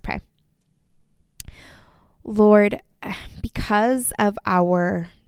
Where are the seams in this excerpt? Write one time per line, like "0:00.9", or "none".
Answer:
none

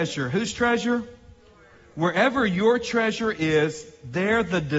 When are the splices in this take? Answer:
none

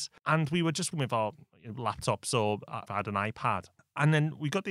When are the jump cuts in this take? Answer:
0:00.9
0:02.9

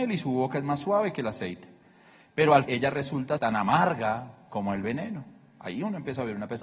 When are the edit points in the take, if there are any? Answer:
0:02.6
0:03.4

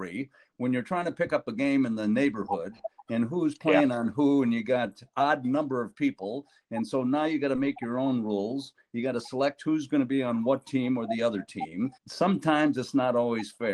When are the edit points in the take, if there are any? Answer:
0:12.0

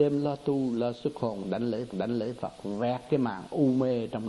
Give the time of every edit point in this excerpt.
0:01.9

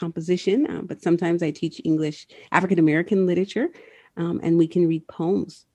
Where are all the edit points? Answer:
none

